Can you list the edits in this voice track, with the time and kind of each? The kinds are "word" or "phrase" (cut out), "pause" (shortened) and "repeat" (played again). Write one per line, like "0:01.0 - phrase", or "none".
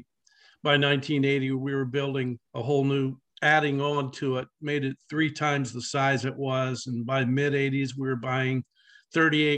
0:02.5 - pause
0:03.3 - pause